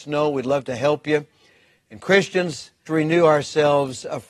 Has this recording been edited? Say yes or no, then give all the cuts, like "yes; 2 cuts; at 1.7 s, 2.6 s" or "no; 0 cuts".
yes; 1 cut; at 2.9 s